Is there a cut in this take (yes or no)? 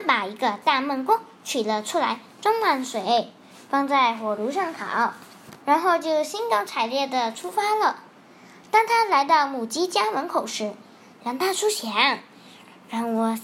no